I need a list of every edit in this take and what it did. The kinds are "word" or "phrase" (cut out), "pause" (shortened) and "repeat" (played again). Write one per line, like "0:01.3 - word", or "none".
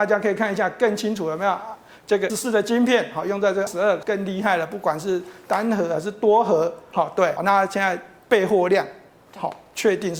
0:02.3 - word
0:03.7 - word
0:04.0 - word
0:06.9 - word
0:07.4 - word